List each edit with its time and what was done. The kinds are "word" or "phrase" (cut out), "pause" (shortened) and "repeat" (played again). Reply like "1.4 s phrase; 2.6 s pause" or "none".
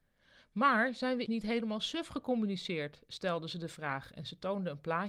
1.3 s word